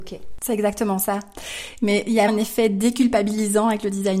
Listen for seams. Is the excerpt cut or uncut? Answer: cut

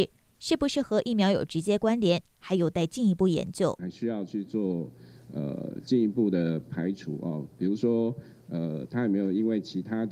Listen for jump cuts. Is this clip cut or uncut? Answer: uncut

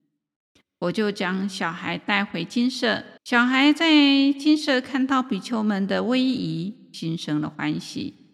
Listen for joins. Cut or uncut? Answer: cut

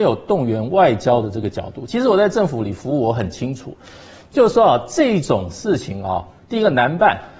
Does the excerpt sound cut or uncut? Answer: uncut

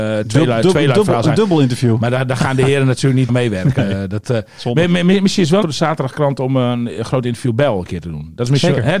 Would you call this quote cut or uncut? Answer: cut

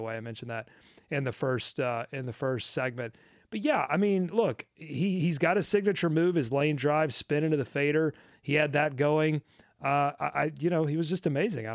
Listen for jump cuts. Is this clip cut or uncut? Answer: uncut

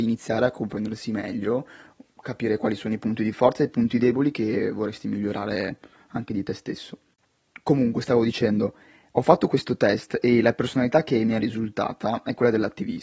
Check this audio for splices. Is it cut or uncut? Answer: uncut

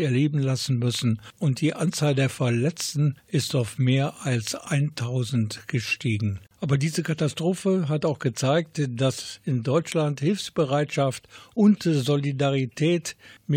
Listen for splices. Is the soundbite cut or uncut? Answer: uncut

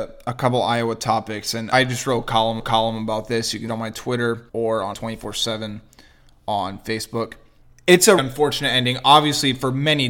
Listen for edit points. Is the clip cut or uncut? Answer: cut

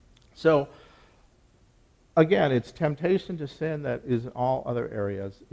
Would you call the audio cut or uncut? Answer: uncut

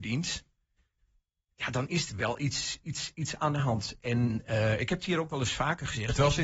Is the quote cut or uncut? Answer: uncut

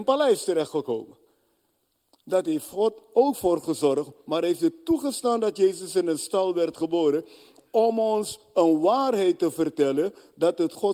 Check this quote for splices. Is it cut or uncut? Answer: uncut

